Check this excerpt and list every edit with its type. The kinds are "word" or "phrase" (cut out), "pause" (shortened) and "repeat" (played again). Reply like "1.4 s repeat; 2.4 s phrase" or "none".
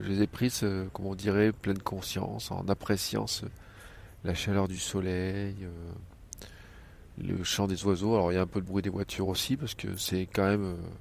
none

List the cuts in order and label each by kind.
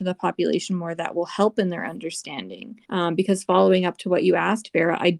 2.8 s pause

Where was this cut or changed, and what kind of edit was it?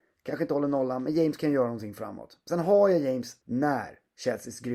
3.4 s pause

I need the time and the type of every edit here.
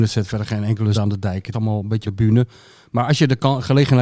0.9 s word; 1.5 s word; 2.0 s word

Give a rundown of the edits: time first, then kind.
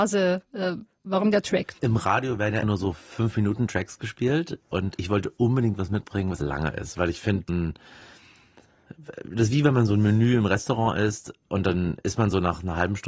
2.6 s word; 5.0 s word; 6.4 s word; 7.5 s word

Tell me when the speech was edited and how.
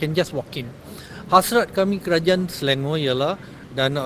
none

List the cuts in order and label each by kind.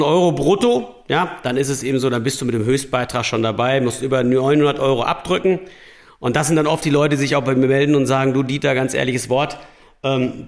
none

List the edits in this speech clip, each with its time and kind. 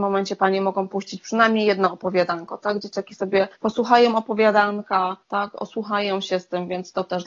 3.5 s pause; 5.2 s pause

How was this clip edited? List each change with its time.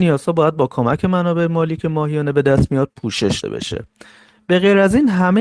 3.4 s word

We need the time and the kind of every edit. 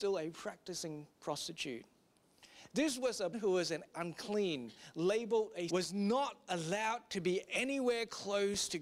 1.1 s pause; 3.3 s word; 3.9 s phrase; 5.7 s word

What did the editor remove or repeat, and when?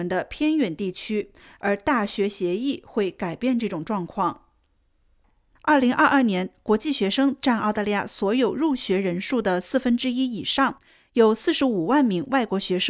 none

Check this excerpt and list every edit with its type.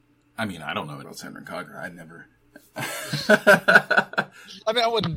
1.0 s word; 2.3 s pause

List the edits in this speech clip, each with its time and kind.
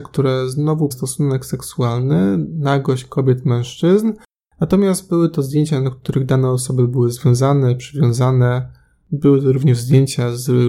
0.9 s word

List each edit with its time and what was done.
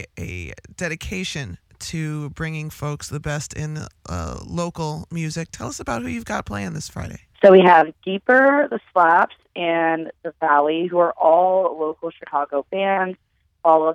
7.3 s pause

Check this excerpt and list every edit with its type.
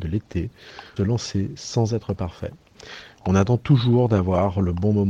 1.0 s word

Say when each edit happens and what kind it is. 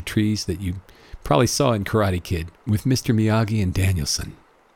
none

